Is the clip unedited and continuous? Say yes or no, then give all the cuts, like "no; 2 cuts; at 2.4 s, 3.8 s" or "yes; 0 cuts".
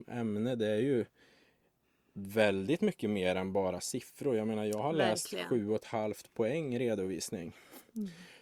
yes; 0 cuts